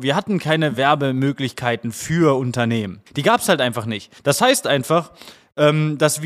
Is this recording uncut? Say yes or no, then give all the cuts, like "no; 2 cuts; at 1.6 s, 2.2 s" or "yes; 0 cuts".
no; 2 cuts; at 3.1 s, 4.2 s